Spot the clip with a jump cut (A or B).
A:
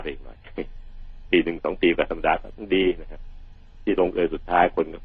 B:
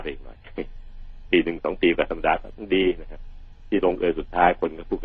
B